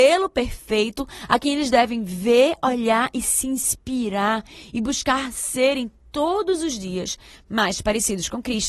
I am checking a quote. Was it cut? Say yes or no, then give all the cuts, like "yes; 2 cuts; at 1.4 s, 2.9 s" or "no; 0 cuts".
no; 0 cuts